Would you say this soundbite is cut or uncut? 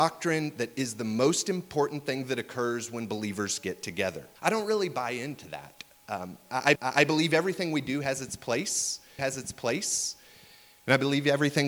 cut